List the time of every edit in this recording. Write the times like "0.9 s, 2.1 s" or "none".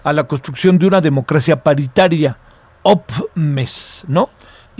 none